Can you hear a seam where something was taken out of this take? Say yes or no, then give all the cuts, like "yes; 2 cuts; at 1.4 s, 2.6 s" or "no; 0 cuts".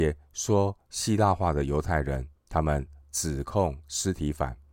yes; 2 cuts; at 2.4 s, 3.0 s